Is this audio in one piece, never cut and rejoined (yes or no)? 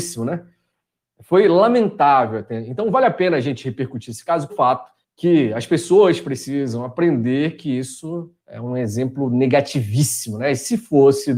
no